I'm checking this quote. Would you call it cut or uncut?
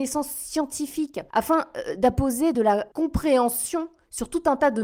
uncut